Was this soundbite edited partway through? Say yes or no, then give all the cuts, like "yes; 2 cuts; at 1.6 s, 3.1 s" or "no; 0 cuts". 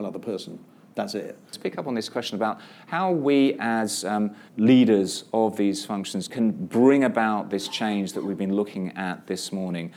yes; 2 cuts; at 4.5 s, 6.3 s